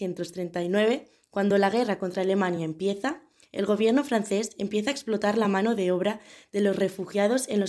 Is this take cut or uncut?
uncut